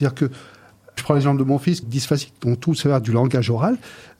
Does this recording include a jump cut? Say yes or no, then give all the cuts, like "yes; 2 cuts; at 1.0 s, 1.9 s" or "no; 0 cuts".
yes; 2 cuts; at 1.0 s, 1.8 s